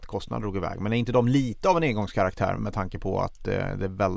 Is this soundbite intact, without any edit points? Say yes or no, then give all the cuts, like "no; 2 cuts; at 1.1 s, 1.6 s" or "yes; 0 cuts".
no; 1 cut; at 2.6 s